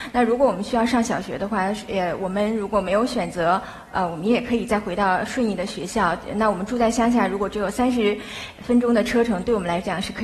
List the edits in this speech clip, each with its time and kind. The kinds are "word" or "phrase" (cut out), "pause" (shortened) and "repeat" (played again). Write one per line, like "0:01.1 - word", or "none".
none